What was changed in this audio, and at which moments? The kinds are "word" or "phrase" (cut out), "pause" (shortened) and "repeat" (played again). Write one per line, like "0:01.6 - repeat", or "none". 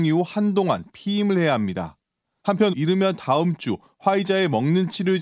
0:02.7 - word